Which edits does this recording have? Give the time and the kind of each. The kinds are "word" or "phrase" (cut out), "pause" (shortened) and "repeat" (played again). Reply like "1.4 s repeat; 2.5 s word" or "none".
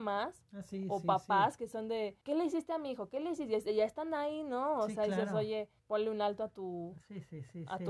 2.2 s pause; 5.8 s pause

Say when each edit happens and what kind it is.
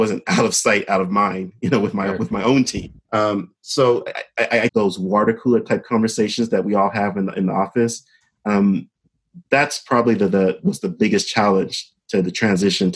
3.1 s pause; 4.7 s phrase

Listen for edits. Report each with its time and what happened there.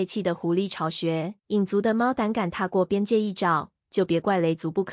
1.4 s pause

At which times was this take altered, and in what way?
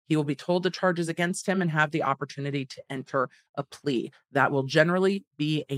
none

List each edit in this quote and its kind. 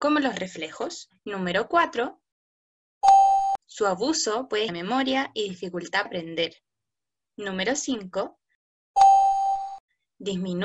1.2 s pause; 3.6 s pause; 4.7 s phrase; 6.1 s word

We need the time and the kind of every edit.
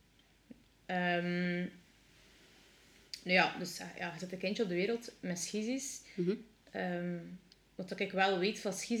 none

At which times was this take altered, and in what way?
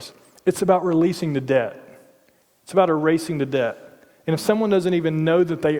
none

